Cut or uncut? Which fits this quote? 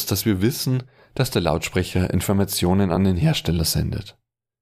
uncut